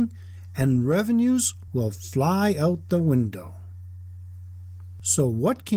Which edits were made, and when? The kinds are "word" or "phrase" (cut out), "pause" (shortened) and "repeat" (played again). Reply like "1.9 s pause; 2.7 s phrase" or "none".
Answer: none